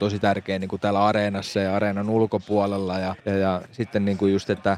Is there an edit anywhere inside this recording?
yes; 2 cuts; at 3.2 s, 3.7 s

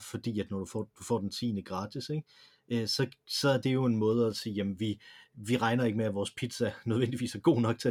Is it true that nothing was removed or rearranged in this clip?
yes; 0 cuts

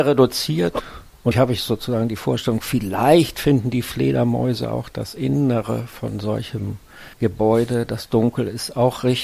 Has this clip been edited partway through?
yes; 2 cuts; at 1.3 s, 7.1 s

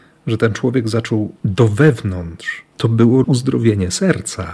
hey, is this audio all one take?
no; 3 cuts; at 1.4 s, 2.7 s, 3.2 s

